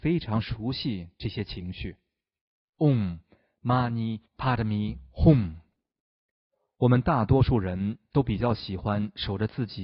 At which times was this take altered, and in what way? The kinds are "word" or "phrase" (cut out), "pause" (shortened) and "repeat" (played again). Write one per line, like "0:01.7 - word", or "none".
0:04.3 - pause